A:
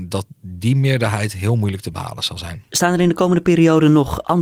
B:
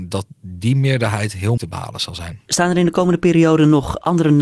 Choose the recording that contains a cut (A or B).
B